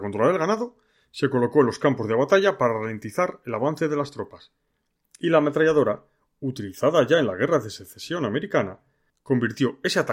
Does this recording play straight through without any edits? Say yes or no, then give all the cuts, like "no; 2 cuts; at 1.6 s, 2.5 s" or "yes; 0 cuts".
yes; 0 cuts